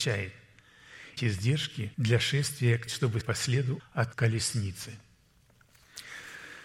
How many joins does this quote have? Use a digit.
6